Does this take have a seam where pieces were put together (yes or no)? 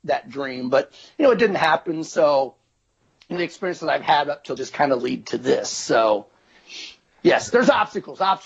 yes